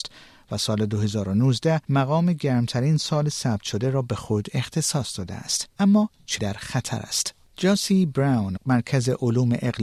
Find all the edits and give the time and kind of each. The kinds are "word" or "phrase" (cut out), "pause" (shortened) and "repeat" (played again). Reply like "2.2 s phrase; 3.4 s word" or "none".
1.8 s pause; 5.7 s pause; 6.4 s word; 8.6 s word